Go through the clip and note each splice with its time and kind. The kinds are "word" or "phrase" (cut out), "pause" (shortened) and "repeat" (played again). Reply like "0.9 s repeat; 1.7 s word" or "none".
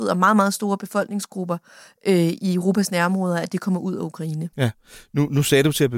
4.5 s pause